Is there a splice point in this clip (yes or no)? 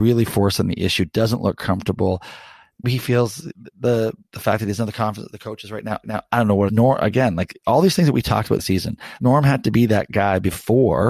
yes